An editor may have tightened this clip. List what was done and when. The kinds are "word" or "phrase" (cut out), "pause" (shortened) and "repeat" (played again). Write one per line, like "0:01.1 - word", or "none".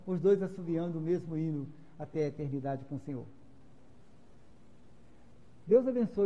none